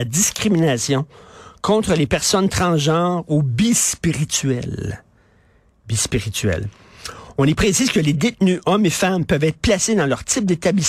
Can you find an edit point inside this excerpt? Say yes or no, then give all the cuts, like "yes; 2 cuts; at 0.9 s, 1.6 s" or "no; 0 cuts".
no; 0 cuts